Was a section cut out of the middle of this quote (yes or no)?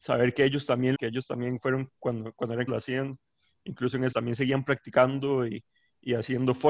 yes